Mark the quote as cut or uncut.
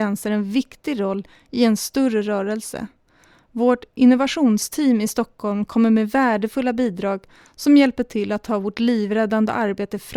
uncut